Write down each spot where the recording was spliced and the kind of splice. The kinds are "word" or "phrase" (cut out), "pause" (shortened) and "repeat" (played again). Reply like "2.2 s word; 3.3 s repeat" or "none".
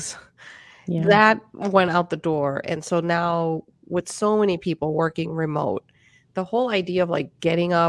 none